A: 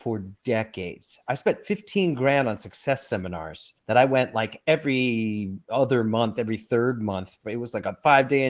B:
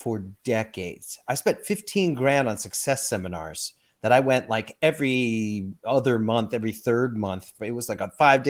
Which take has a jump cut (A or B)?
A